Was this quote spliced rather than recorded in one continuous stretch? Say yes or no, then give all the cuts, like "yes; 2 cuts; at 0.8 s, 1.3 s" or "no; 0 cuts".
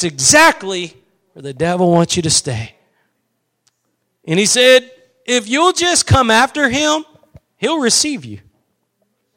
no; 0 cuts